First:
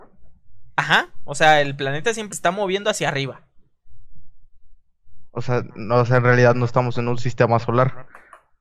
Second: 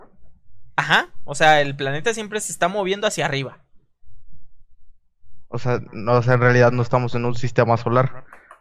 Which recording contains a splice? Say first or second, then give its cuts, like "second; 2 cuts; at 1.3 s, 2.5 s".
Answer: first; 1 cut; at 2.3 s